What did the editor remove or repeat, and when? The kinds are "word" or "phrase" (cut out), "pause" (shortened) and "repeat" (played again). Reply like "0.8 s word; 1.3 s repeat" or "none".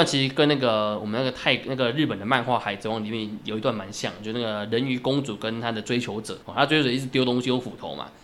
6.4 s pause